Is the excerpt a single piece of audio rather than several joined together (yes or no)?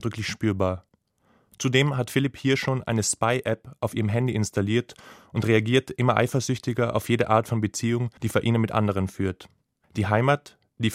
no